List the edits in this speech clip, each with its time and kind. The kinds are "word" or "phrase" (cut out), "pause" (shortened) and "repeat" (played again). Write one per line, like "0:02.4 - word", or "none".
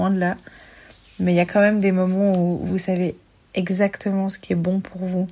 none